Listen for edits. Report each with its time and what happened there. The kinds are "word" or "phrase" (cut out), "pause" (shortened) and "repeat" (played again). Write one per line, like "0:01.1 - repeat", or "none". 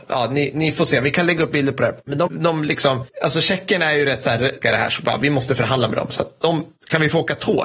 0:02.3 - word
0:04.6 - word